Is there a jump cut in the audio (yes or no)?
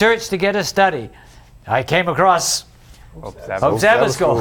no